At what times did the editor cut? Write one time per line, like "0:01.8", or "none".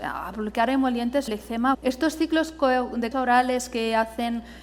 0:01.3
0:01.7
0:03.1